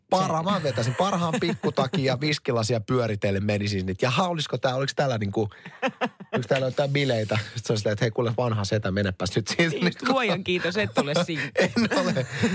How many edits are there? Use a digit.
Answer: 0